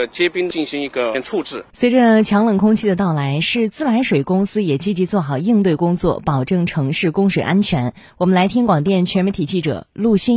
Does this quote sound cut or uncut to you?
cut